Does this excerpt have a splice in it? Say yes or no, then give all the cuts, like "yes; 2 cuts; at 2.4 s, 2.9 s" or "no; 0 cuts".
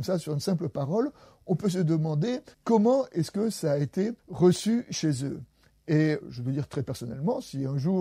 yes; 3 cuts; at 2.5 s, 4.2 s, 6.2 s